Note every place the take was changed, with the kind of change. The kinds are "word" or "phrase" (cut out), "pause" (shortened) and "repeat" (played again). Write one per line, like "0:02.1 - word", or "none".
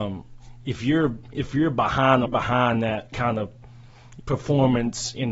0:02.3 - phrase
0:03.1 - word
0:04.2 - word